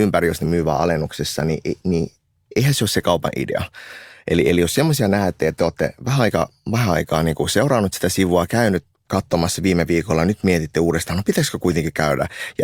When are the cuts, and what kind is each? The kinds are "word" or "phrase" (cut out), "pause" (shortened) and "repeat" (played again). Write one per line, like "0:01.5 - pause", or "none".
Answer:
none